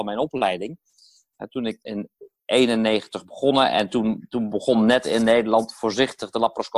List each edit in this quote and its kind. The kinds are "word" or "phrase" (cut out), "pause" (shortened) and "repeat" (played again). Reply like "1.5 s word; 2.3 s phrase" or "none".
none